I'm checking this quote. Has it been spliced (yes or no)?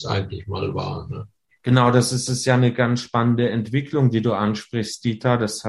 yes